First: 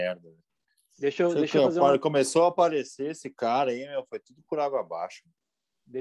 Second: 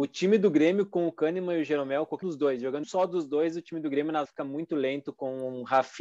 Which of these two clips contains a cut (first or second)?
second